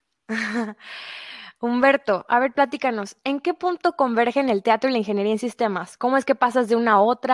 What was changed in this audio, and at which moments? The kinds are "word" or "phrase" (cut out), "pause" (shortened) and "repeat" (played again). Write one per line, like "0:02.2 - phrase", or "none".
none